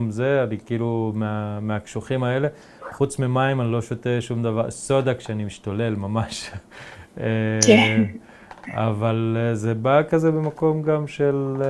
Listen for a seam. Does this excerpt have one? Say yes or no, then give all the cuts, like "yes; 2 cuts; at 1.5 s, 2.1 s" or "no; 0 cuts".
no; 0 cuts